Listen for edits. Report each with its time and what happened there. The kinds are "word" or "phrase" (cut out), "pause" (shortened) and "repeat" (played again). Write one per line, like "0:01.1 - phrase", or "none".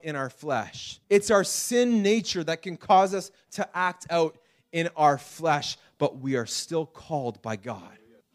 0:01.0 - pause